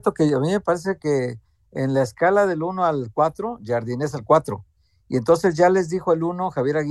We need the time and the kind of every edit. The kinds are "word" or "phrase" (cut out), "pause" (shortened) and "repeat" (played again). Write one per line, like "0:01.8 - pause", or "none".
none